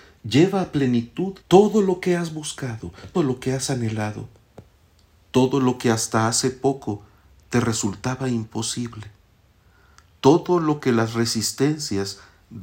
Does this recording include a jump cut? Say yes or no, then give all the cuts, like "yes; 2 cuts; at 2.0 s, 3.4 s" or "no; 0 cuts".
yes; 2 cuts; at 1.4 s, 3.1 s